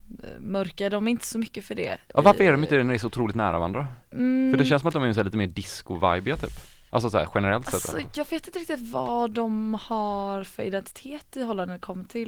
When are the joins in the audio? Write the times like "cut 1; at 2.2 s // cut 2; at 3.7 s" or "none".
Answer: cut 1; at 4.0 s